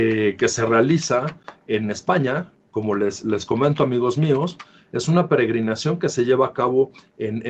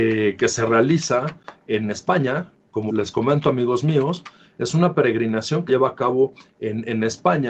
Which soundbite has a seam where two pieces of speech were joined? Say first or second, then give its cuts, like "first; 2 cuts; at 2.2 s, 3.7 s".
second; 2 cuts; at 2.9 s, 5.7 s